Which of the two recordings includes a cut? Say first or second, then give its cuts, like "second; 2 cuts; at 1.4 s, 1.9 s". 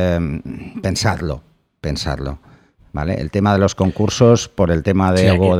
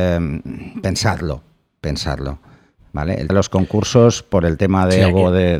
second; 1 cut; at 3.3 s